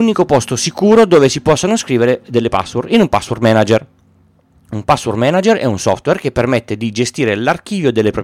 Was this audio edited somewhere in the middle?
no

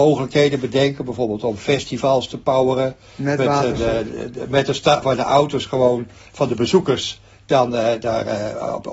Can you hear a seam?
yes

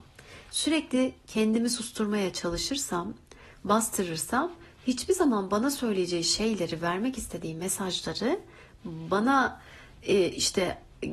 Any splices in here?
no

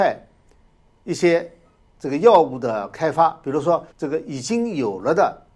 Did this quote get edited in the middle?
yes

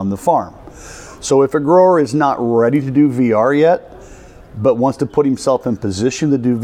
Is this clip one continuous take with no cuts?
yes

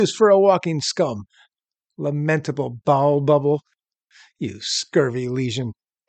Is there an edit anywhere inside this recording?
no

